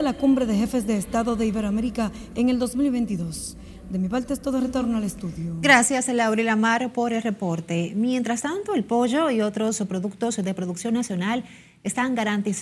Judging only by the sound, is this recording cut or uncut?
uncut